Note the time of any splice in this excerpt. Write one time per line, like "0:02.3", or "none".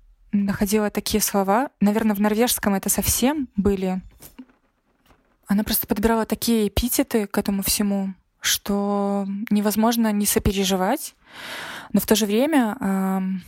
none